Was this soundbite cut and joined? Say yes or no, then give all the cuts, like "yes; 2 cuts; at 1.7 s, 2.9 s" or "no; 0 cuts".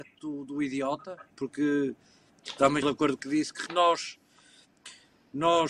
yes; 4 cuts; at 1.3 s, 2.8 s, 3.2 s, 3.7 s